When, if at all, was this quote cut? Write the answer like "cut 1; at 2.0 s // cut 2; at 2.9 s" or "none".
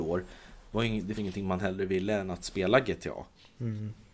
cut 1; at 1.2 s